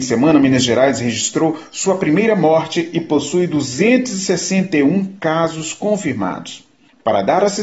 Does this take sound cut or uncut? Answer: uncut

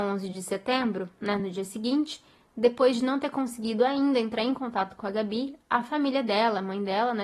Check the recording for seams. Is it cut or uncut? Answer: uncut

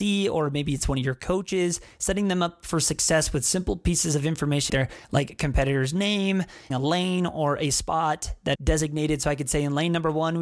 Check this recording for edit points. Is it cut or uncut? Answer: cut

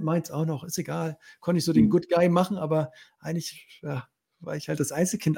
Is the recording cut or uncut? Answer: uncut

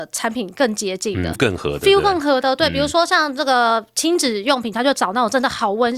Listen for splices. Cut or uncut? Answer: cut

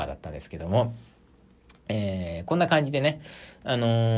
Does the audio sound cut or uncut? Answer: uncut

